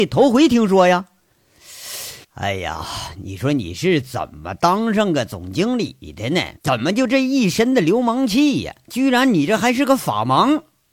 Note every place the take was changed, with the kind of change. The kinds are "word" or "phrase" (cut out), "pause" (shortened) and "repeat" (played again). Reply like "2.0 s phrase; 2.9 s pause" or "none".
2.2 s pause; 6.6 s pause